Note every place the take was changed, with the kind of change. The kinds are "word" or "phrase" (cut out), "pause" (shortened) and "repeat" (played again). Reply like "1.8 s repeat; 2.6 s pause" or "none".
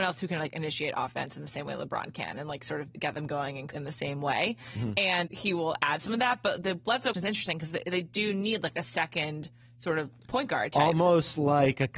2.9 s word; 3.7 s word; 5.3 s word; 7.1 s word